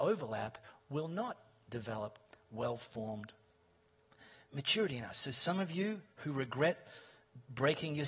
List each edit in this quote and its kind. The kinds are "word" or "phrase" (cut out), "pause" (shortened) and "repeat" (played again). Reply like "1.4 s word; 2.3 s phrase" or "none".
none